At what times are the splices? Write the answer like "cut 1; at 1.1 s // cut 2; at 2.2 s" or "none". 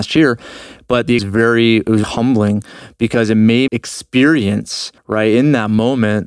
cut 1; at 1.2 s // cut 2; at 2.0 s // cut 3; at 3.7 s // cut 4; at 5.0 s